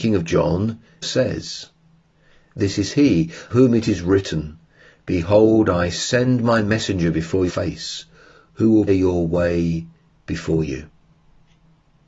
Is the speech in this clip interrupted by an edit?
yes; 4 cuts; at 1.0 s, 3.5 s, 7.5 s, 8.9 s

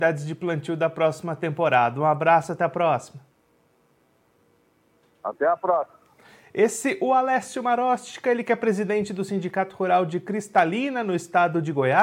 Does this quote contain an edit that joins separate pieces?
no; 0 cuts

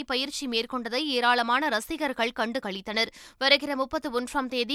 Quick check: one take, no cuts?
yes; 0 cuts

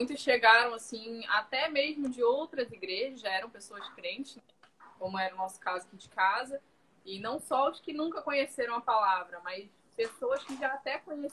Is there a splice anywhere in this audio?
no; 0 cuts

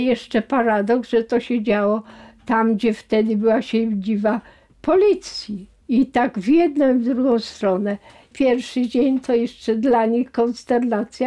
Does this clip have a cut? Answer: no; 0 cuts

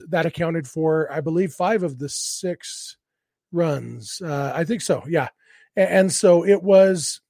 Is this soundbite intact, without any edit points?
yes; 0 cuts

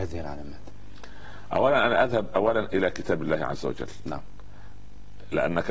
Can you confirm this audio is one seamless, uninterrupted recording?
yes; 0 cuts

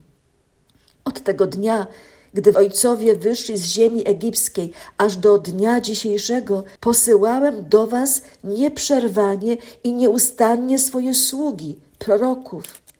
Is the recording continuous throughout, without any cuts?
no; 2 cuts; at 2.5 s, 6.8 s

